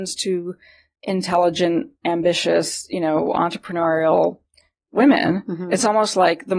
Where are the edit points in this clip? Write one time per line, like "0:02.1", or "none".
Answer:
none